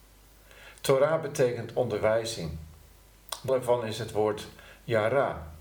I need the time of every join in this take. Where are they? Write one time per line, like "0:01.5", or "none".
0:03.5